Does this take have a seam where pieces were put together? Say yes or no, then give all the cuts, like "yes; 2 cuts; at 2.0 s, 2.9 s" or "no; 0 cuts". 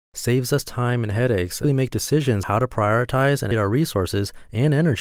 yes; 3 cuts; at 1.6 s, 2.4 s, 3.5 s